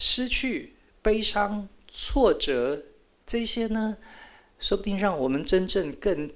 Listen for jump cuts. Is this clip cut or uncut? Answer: uncut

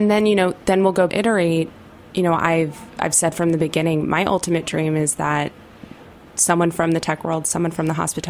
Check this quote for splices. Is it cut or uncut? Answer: cut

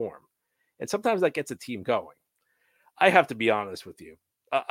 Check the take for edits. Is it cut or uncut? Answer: uncut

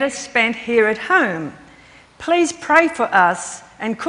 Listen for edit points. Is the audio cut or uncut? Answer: uncut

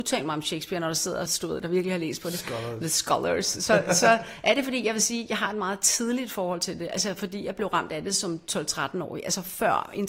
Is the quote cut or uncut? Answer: cut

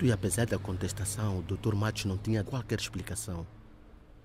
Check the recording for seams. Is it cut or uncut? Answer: cut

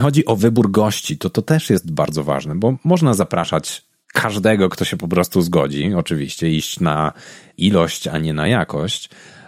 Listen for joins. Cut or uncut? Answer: uncut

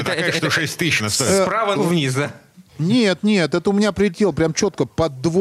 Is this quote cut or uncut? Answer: cut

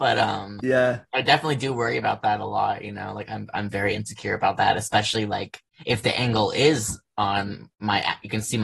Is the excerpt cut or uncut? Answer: cut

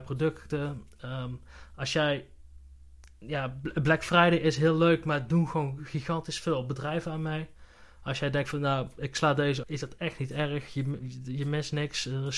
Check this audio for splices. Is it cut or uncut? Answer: cut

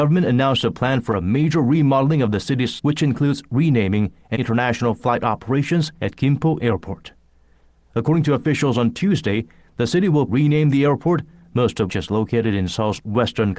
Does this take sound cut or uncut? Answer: cut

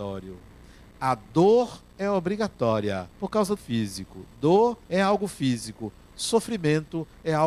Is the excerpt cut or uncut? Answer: cut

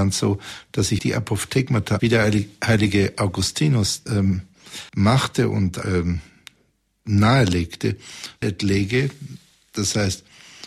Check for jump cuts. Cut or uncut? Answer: cut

